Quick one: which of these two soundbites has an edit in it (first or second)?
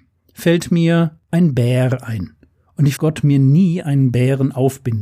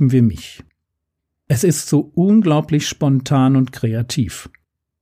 first